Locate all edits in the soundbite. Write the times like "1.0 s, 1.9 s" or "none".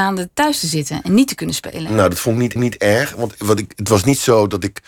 2.6 s, 3.3 s